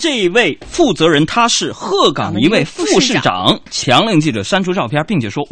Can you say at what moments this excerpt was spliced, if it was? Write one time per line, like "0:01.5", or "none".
0:03.6